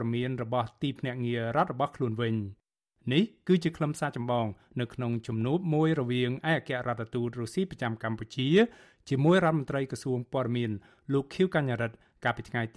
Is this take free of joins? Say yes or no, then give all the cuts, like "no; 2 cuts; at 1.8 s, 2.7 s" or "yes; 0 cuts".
yes; 0 cuts